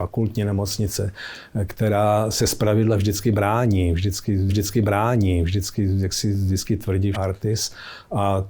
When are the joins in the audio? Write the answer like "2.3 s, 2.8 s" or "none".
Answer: 4.5 s, 7.1 s